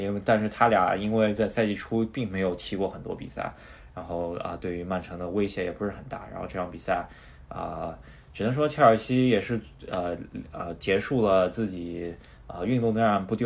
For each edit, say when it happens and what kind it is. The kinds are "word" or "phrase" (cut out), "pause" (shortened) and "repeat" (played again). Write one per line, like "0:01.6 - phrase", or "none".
none